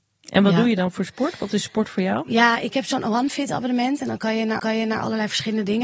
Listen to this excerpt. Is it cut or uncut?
cut